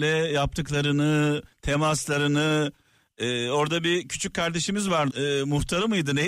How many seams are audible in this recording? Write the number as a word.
two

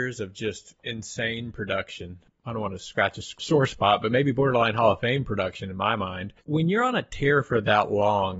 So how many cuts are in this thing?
one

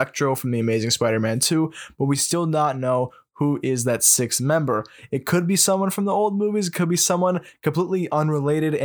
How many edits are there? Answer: zero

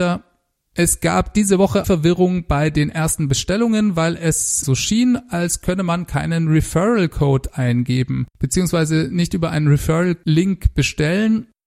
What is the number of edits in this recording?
two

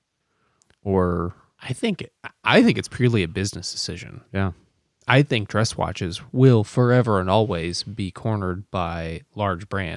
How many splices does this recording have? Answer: zero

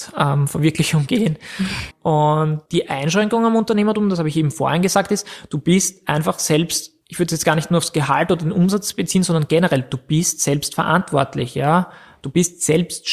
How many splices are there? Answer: three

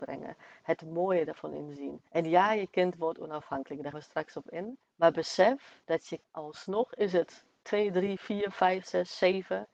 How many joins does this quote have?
five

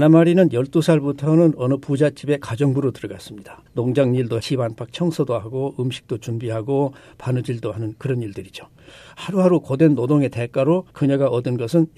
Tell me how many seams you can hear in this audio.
three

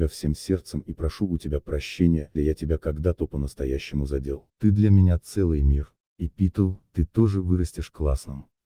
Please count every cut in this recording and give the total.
two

